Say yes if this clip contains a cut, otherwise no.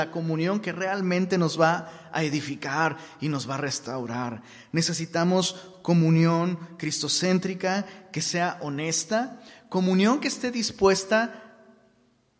no